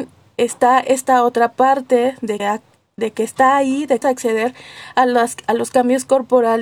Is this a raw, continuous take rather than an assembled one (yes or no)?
no